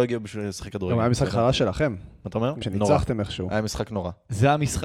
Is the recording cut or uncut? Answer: cut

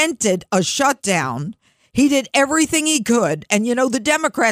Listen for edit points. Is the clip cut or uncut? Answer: uncut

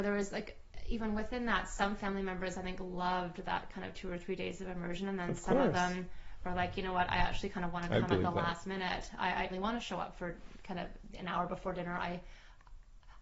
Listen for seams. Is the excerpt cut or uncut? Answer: cut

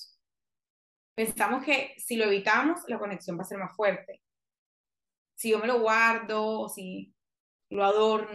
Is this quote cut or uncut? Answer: uncut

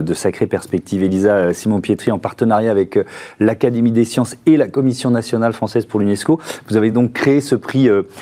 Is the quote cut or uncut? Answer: uncut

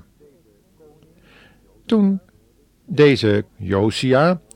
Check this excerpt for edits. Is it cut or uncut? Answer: cut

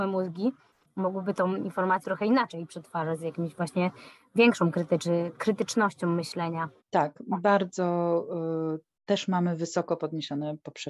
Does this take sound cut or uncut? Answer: cut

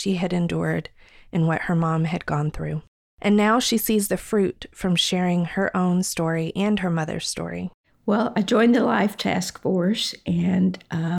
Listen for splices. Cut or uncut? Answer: uncut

